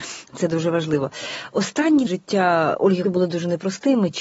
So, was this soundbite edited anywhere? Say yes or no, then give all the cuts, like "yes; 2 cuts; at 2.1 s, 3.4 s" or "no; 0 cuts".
yes; 2 cuts; at 2.1 s, 3.0 s